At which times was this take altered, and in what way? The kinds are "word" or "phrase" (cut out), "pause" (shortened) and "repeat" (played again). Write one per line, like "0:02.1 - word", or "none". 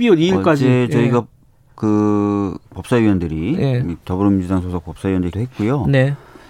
0:05.3 - word